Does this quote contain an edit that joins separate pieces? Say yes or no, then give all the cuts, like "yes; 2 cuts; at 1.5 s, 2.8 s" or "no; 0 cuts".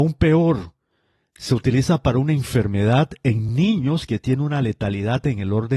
no; 0 cuts